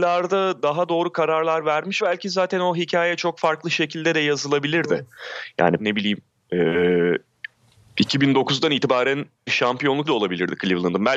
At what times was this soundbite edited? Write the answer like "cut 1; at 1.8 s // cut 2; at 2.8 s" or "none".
cut 1; at 2.0 s // cut 2; at 5.8 s // cut 3; at 9.5 s // cut 4; at 10.0 s